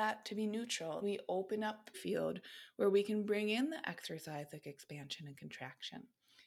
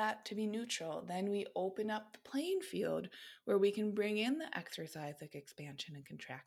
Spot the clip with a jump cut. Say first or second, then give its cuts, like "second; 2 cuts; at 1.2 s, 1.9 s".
first; 2 cuts; at 1.0 s, 1.9 s